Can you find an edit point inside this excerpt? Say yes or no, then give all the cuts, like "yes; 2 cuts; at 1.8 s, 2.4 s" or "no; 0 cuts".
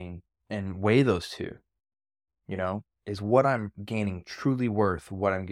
no; 0 cuts